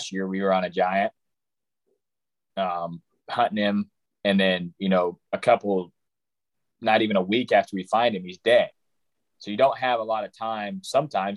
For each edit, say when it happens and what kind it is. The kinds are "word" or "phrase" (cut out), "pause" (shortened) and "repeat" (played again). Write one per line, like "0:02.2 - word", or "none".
none